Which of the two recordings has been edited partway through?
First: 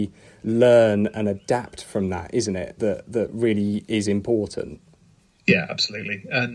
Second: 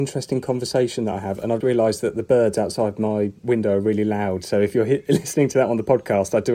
second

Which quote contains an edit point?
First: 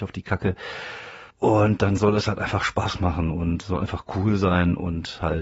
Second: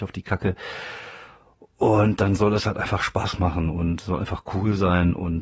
first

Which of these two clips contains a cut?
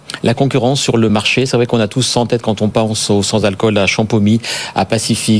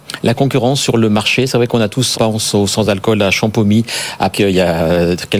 second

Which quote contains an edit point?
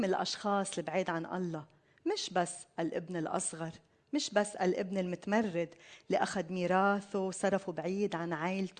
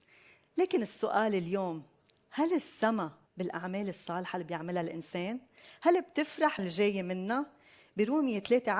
second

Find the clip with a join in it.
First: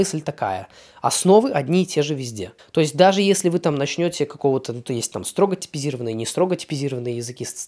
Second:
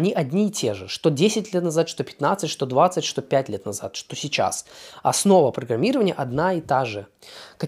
first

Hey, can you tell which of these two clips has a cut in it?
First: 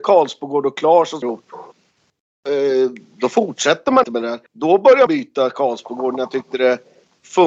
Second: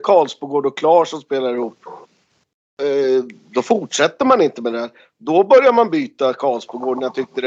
first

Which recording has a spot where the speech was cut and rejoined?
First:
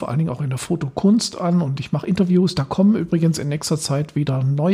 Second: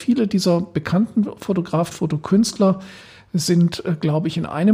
second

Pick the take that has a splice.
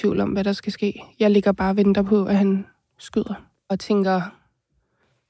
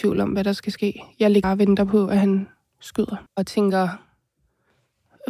second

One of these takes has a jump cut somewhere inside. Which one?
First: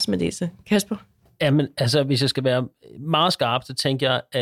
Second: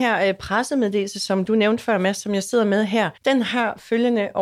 second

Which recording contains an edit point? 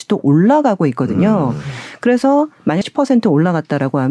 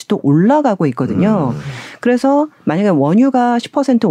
first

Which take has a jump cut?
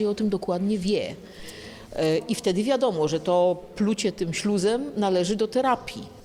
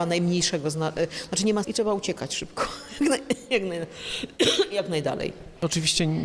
second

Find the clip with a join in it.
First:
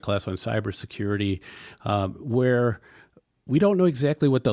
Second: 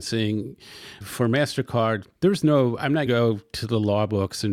second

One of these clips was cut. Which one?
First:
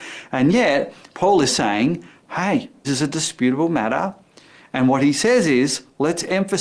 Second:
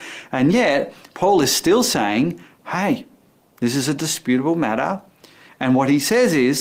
first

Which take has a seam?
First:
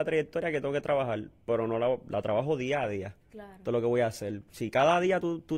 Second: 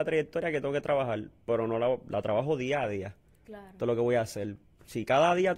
first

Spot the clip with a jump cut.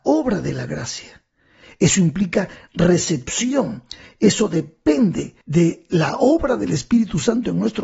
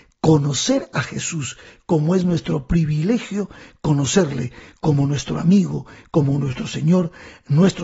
first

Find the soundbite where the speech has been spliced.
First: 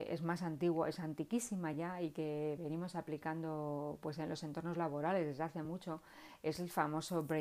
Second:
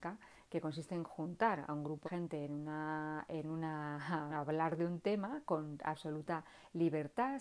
second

